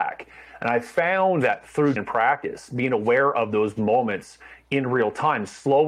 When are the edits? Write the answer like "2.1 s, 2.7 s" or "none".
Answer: 2.0 s